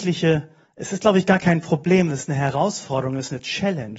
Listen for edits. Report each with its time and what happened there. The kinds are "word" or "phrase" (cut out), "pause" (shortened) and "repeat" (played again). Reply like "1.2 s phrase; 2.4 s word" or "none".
2.1 s word